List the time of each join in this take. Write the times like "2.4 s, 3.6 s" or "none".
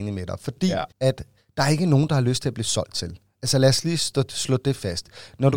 0.9 s